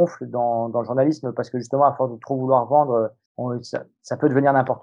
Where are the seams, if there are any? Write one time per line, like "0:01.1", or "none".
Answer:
0:03.3